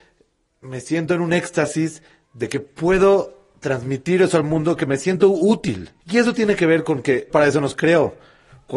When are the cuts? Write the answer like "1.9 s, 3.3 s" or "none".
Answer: 6.0 s, 7.3 s